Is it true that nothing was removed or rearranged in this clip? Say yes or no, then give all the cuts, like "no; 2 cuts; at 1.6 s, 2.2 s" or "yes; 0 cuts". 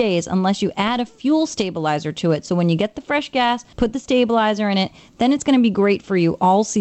no; 1 cut; at 3.7 s